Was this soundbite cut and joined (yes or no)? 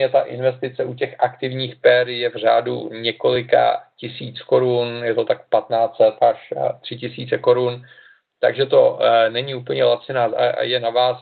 yes